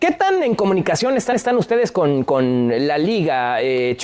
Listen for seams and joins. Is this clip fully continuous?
no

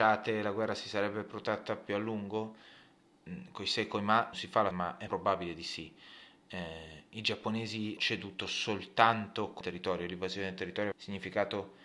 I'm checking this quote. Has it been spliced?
yes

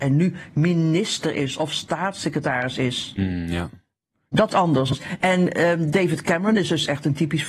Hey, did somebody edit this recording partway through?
yes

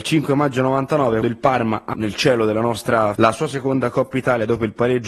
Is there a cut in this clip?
yes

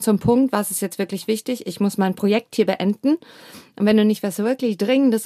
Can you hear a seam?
no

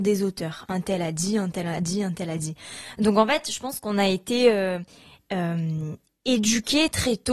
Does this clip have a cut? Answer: no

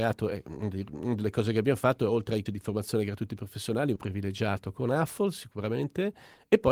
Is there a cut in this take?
yes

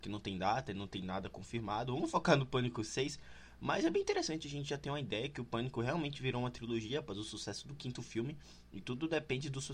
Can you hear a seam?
no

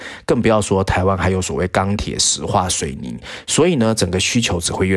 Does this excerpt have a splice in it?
no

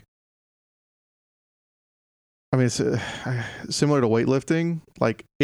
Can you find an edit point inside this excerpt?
no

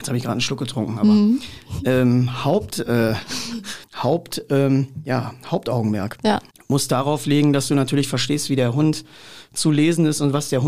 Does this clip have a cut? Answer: yes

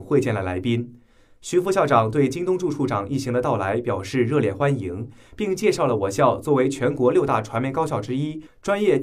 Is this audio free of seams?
yes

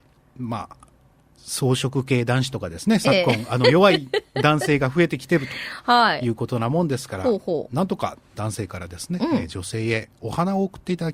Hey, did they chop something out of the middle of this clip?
yes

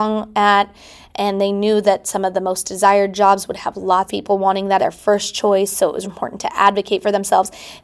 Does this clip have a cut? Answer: yes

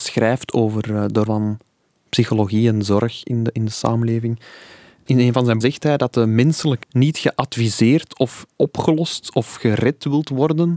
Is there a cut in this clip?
yes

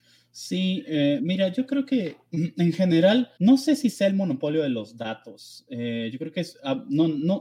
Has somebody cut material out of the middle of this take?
yes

